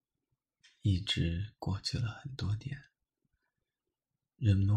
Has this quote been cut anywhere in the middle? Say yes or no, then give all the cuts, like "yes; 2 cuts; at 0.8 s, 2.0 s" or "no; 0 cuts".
no; 0 cuts